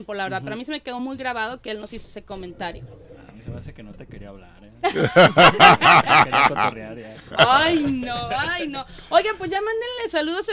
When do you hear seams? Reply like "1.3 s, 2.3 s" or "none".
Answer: none